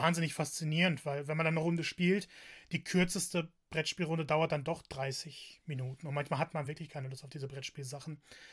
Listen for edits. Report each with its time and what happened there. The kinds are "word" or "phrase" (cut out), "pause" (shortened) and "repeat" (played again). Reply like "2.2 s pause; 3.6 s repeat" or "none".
none

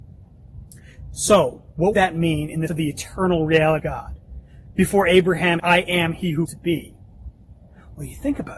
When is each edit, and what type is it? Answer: 1.9 s word; 2.7 s word; 3.8 s word; 5.6 s word; 6.5 s word

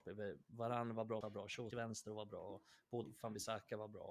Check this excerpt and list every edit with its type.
1.2 s word; 1.7 s word; 3.0 s word

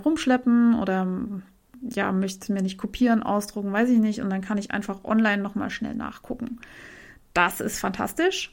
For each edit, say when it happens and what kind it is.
none

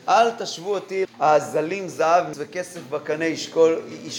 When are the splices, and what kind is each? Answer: 1.0 s word; 2.3 s word

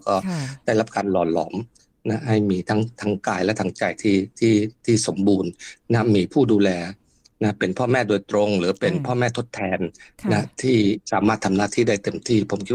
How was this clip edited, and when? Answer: none

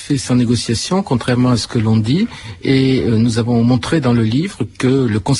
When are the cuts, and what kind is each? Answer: none

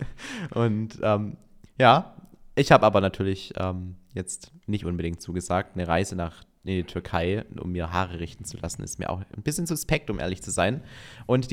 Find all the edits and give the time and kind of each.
none

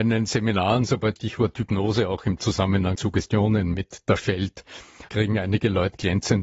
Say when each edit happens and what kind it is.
1.2 s word; 2.9 s word; 4.2 s word; 5.1 s word

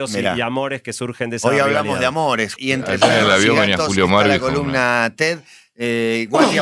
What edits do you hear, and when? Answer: 2.6 s word

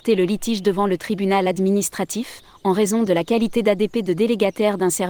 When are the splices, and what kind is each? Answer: none

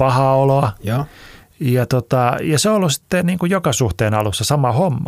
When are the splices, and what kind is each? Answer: none

